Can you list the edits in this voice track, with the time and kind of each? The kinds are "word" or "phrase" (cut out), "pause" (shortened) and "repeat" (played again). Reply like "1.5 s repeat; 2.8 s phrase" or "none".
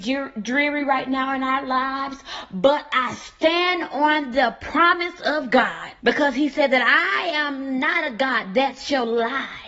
6.0 s pause